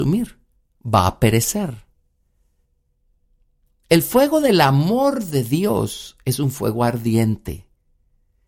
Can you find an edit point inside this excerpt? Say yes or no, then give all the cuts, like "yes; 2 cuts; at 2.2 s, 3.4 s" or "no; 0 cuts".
no; 0 cuts